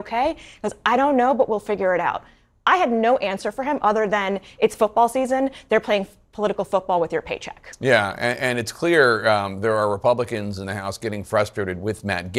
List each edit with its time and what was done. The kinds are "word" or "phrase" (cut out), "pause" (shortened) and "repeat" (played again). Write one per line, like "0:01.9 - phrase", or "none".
none